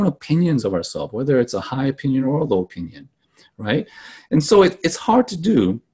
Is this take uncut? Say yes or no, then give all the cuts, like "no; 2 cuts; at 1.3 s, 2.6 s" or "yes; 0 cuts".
yes; 0 cuts